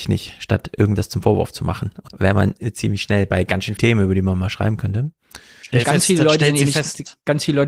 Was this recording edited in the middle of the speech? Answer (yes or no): yes